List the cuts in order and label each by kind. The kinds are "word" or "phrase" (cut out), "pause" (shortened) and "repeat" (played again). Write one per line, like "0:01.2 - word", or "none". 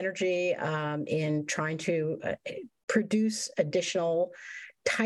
none